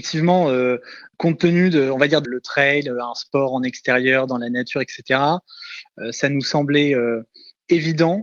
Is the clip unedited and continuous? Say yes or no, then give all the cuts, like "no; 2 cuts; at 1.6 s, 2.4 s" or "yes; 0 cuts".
no; 1 cut; at 2.2 s